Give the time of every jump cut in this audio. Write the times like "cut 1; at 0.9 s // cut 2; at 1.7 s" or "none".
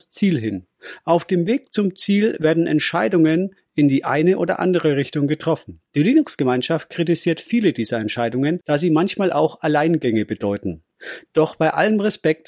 cut 1; at 5.9 s